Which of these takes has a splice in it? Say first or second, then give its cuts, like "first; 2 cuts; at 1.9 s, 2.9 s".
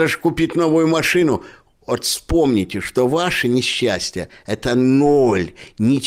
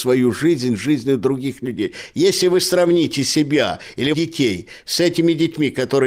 second; 1 cut; at 4.1 s